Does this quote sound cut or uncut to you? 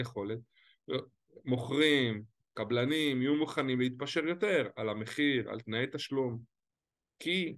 uncut